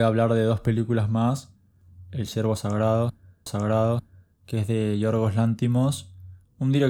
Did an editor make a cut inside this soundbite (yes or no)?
yes